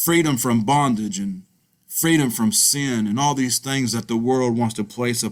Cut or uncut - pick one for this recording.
uncut